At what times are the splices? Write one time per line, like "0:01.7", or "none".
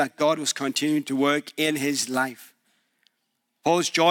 none